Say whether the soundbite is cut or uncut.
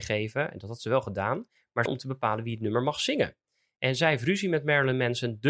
cut